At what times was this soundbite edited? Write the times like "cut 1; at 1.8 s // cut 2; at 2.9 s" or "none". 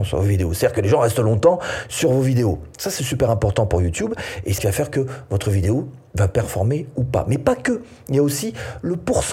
cut 1; at 4.6 s